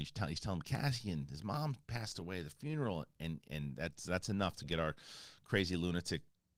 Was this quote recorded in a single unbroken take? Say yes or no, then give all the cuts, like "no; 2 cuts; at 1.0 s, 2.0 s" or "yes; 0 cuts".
yes; 0 cuts